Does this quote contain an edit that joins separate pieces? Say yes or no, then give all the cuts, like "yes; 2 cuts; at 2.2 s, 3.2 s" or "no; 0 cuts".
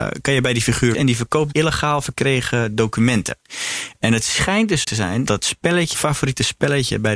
yes; 5 cuts; at 0.9 s, 1.5 s, 4.8 s, 5.3 s, 5.9 s